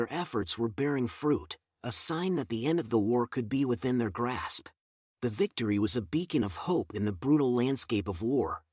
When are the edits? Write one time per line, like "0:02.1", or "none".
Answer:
0:04.8